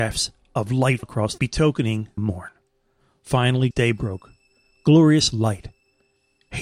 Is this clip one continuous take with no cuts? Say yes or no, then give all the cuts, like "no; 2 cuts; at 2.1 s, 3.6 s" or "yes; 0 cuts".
no; 4 cuts; at 1.0 s, 1.4 s, 2.2 s, 3.7 s